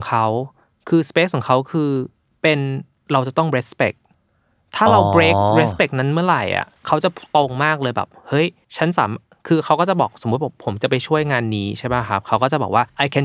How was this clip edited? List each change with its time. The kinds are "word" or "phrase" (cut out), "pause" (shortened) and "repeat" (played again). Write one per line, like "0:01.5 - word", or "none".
0:06.8 - pause
0:08.6 - pause